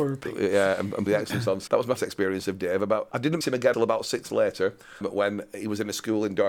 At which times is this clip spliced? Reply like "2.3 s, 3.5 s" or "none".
1.1 s, 1.7 s, 2.0 s, 3.1 s, 3.4 s, 3.7 s, 4.3 s, 5.0 s